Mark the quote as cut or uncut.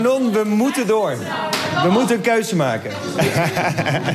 uncut